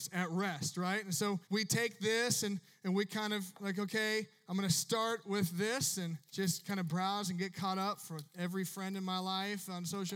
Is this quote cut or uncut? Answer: cut